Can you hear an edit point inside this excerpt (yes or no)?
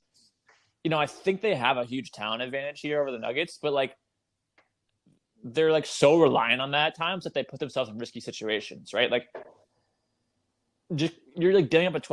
no